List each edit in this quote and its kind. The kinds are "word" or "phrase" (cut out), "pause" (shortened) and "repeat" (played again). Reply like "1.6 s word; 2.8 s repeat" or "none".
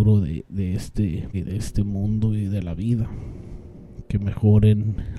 1.3 s word

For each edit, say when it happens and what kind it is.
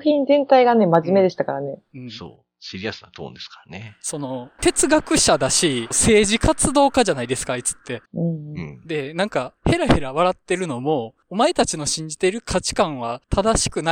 8.0 s pause; 9.6 s pause

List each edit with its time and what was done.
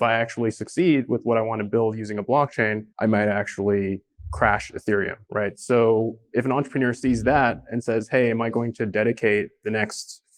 2.9 s pause; 5.2 s pause

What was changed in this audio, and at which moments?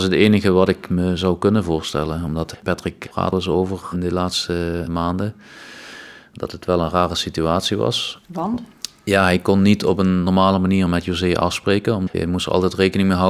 3.3 s phrase; 8.2 s pause

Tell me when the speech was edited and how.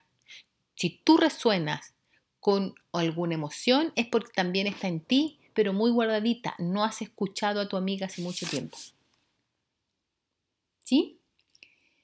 none

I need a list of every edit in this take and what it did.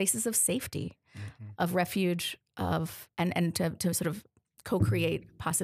3.1 s pause

